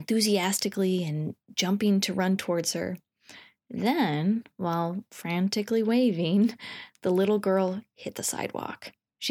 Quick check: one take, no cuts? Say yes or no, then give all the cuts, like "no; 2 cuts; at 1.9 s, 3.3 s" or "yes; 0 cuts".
yes; 0 cuts